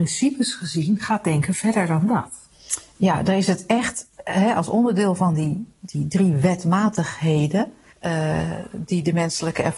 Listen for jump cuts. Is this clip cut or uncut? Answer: cut